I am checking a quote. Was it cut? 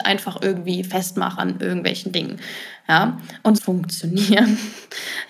yes; 2 cuts; at 1.4 s, 3.6 s

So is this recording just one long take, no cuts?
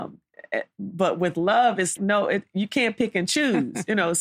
no; 1 cut; at 2.0 s

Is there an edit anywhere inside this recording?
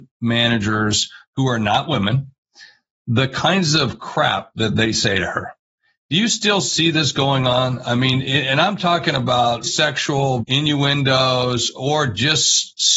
yes; 2 cuts; at 9.6 s, 10.4 s

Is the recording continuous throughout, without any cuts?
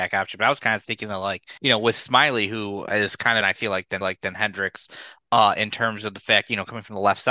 no; 3 cuts; at 1.6 s, 3.4 s, 4.0 s

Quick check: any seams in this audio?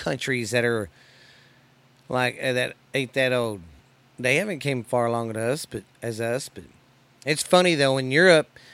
no; 0 cuts

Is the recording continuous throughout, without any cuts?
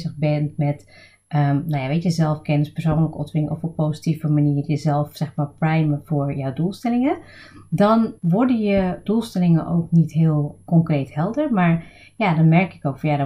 no; 2 cuts; at 8.2 s, 9.0 s

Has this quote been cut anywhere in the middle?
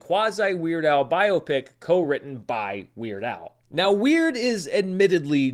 no; 0 cuts

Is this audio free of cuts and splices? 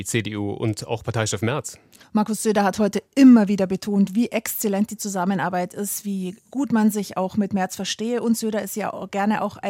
no; 1 cut; at 2.0 s

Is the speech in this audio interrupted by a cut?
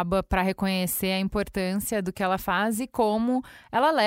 no; 0 cuts

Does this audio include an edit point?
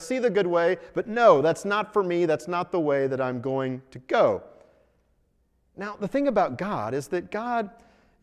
no; 0 cuts

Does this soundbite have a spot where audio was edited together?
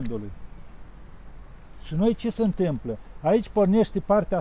no; 0 cuts

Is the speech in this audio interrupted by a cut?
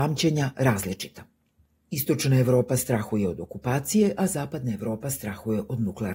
no; 0 cuts

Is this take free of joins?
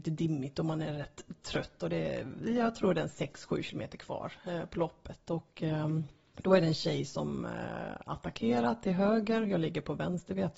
yes; 0 cuts

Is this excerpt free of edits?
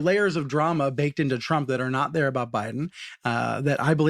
yes; 0 cuts

